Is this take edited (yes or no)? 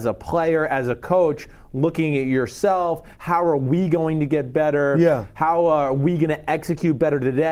no